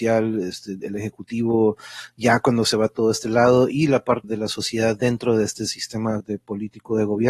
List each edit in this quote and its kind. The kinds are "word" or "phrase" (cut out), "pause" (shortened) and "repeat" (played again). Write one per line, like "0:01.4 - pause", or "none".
0:04.2 - word
0:06.2 - word